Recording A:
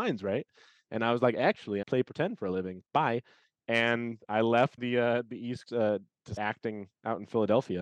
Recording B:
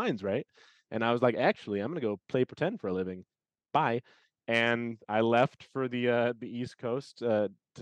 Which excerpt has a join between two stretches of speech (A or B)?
A